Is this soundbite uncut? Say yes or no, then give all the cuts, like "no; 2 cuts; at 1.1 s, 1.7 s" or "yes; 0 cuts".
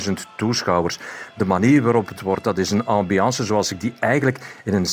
no; 1 cut; at 2.1 s